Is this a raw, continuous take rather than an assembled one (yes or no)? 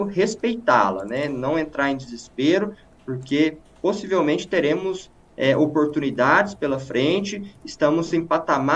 yes